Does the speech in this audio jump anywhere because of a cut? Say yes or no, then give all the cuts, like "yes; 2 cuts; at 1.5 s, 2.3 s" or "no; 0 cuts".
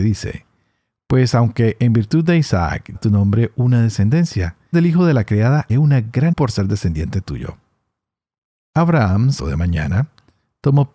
yes; 5 cuts; at 2.9 s, 4.7 s, 5.7 s, 6.3 s, 9.4 s